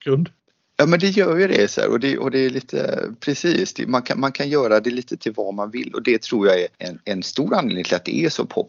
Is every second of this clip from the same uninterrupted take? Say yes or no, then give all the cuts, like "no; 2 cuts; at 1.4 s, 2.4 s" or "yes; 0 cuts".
yes; 0 cuts